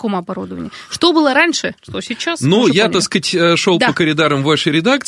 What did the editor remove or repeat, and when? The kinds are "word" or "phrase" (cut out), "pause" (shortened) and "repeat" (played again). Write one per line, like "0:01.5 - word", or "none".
0:01.8 - pause